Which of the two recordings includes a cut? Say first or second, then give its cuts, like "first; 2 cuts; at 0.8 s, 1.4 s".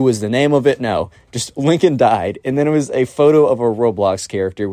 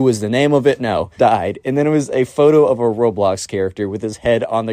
second; 1 cut; at 1.2 s